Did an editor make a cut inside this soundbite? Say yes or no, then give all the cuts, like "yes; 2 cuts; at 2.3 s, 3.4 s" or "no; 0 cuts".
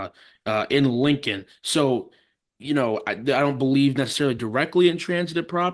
no; 0 cuts